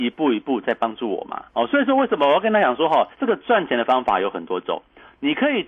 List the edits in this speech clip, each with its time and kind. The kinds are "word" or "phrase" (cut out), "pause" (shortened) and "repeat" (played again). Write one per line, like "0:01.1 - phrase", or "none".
0:01.5 - pause
0:03.1 - pause